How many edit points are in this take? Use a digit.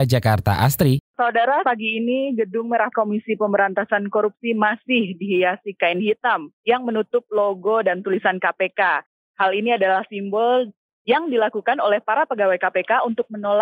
3